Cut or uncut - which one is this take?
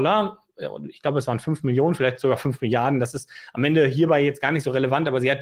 uncut